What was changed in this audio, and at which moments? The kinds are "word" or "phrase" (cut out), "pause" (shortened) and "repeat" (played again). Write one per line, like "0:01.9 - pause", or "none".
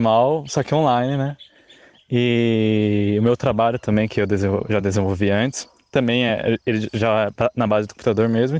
none